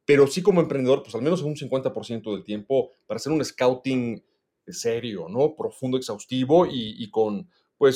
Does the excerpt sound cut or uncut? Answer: uncut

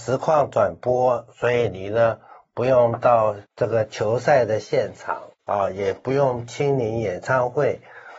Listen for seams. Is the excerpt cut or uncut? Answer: cut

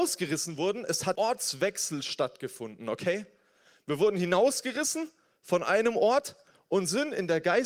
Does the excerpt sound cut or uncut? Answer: cut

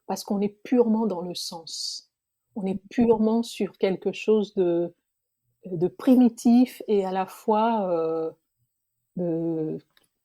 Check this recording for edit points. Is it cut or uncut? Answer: uncut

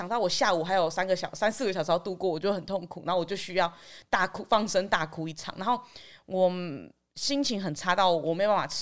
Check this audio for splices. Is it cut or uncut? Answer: uncut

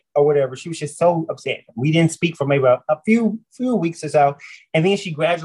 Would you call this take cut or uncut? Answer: uncut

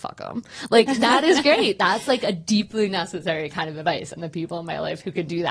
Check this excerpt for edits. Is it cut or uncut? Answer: uncut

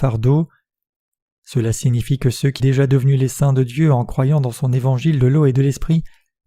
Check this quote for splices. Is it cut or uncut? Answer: cut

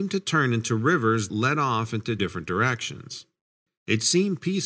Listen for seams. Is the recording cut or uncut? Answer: cut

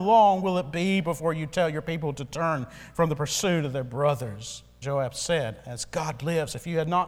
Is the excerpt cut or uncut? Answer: cut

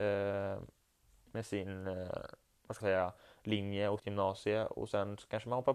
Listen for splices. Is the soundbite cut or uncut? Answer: cut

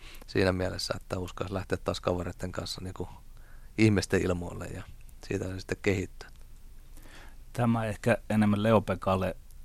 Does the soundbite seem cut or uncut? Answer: uncut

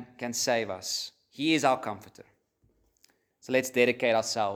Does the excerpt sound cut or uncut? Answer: uncut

